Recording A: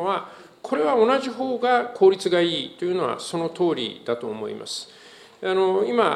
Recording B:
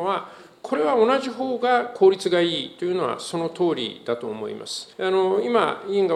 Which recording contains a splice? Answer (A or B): B